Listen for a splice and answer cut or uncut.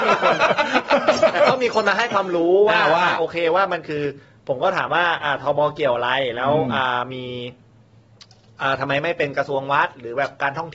uncut